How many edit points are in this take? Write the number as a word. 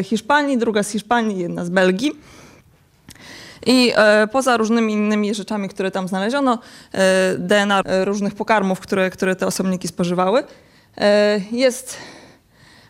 one